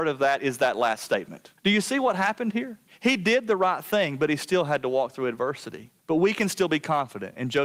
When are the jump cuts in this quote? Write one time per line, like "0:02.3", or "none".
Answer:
0:01.6
0:02.9
0:06.0

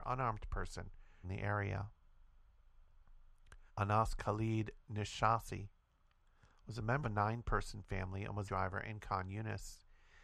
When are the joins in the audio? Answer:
0:01.2
0:03.7
0:07.0
0:08.5

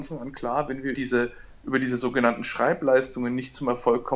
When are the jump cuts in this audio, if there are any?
0:00.9

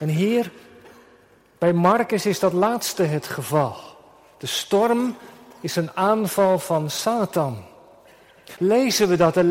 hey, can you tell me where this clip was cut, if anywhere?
none

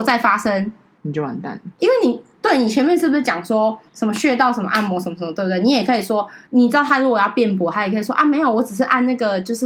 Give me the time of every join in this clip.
0:03.9
0:06.5

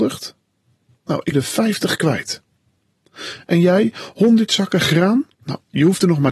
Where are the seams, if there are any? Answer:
0:01.3
0:05.3

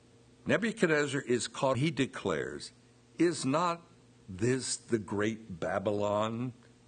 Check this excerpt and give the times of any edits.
0:01.7

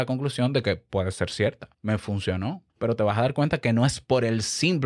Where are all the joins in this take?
0:01.7
0:02.7

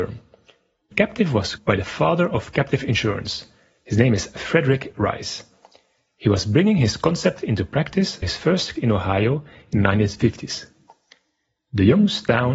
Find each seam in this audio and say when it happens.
0:00.9
0:01.6
0:08.2
0:08.8

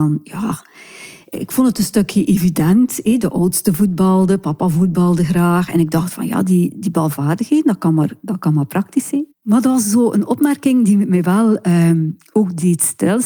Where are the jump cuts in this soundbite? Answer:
0:09.3

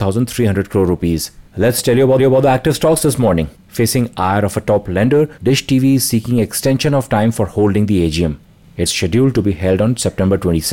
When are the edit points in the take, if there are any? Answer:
0:01.5
0:02.2
0:03.5
0:05.4
0:08.9

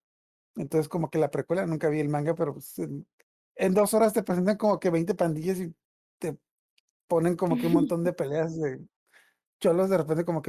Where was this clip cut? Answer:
none

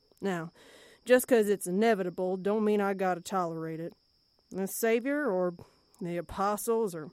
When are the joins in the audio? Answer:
none

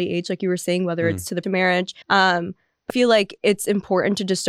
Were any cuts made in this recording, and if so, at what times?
0:01.4
0:02.0
0:02.9

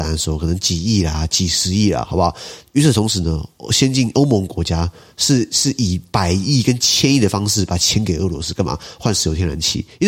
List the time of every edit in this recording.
none

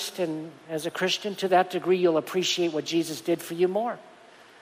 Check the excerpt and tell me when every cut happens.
none

